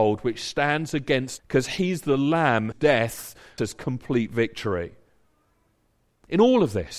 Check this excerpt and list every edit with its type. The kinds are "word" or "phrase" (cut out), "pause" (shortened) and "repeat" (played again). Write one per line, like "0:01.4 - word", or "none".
0:01.4 - word
0:02.7 - word
0:03.6 - word